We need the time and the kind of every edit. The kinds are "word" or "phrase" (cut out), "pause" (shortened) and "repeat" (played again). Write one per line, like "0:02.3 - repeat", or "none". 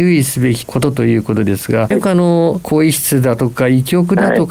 0:01.9 - phrase